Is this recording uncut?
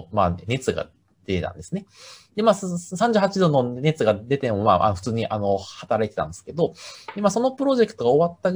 yes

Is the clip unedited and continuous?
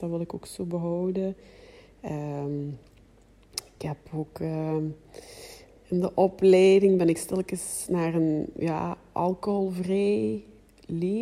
yes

